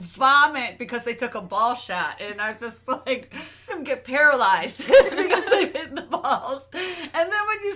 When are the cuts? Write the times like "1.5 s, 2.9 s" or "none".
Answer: 3.7 s, 5.7 s